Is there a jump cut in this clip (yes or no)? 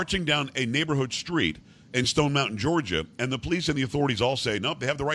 no